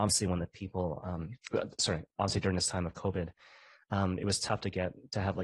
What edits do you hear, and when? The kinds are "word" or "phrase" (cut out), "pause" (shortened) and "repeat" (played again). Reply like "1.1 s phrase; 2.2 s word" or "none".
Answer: none